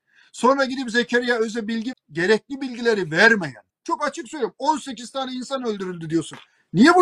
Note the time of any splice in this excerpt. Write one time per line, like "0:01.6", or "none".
0:01.9
0:03.7